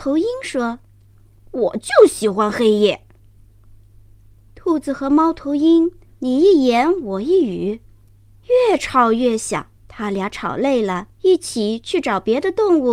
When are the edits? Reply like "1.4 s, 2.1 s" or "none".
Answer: 6.1 s, 9.8 s, 11.1 s

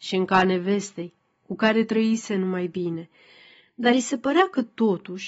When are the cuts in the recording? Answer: none

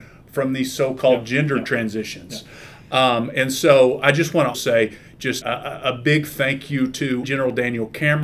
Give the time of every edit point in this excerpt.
4.0 s, 4.5 s, 5.4 s, 7.2 s

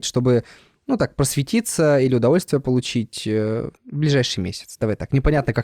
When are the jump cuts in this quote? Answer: 3.8 s

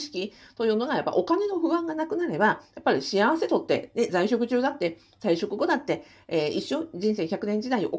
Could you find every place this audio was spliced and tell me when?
none

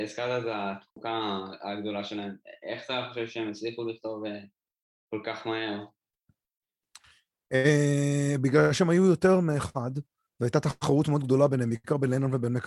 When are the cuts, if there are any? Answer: none

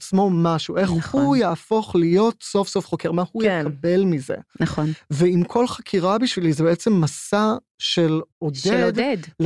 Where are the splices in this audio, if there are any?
8.3 s

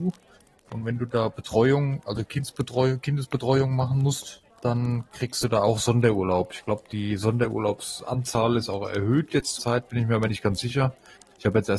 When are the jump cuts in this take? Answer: 4.5 s, 9.6 s

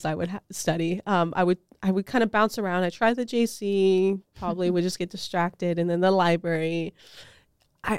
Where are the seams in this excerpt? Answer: none

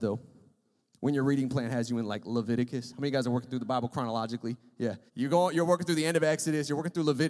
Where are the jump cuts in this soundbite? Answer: 5.1 s

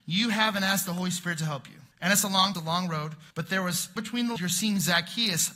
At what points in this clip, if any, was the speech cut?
1.9 s, 2.5 s, 3.3 s, 4.0 s, 4.4 s

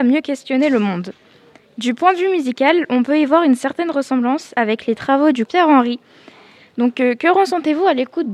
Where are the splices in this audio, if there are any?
5.5 s

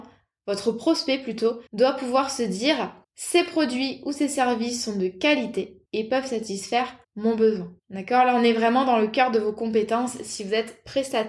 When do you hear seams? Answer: 1.7 s, 3.0 s, 5.8 s, 7.0 s, 7.8 s

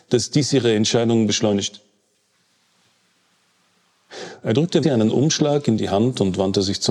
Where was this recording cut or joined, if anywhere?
4.8 s

